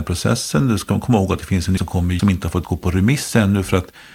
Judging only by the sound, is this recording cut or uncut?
cut